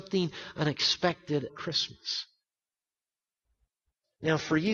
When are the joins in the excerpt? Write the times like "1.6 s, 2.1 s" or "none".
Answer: 1.5 s